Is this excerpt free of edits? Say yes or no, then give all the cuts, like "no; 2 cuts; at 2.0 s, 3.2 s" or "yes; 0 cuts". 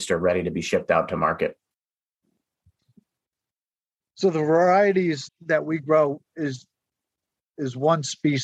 no; 2 cuts; at 5.3 s, 6.3 s